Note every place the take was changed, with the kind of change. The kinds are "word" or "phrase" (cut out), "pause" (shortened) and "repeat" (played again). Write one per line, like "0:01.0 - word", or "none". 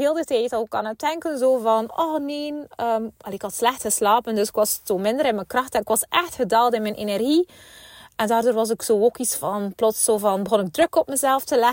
none